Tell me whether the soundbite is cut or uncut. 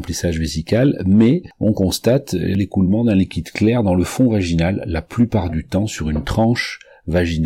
uncut